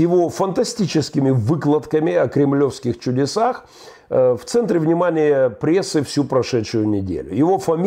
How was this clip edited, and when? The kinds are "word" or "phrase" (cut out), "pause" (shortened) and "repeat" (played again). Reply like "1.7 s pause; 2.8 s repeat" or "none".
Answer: none